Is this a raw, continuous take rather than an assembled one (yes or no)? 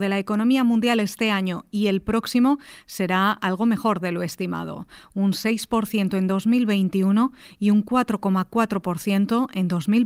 yes